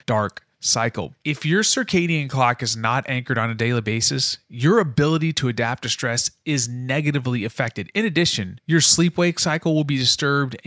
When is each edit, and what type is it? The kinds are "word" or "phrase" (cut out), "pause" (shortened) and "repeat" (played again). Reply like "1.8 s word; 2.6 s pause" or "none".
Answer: none